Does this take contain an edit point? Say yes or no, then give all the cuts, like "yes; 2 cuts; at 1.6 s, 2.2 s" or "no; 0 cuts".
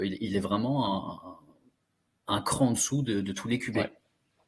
no; 0 cuts